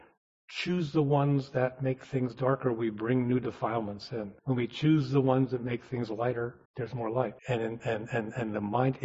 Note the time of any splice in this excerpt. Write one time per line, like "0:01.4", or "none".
0:04.4
0:06.7
0:07.4